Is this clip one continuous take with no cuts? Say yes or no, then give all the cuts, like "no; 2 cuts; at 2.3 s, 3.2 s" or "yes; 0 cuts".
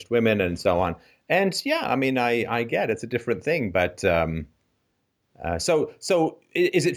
yes; 0 cuts